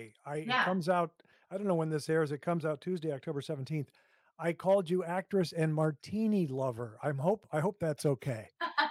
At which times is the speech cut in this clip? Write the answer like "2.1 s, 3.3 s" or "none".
none